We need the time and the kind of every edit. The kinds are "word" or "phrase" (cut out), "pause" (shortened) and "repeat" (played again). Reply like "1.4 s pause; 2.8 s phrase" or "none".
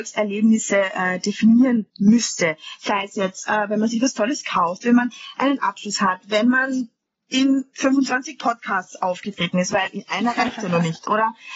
1.9 s pause; 7.1 s pause